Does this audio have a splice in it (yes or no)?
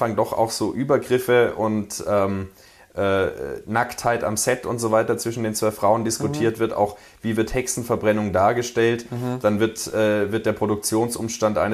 no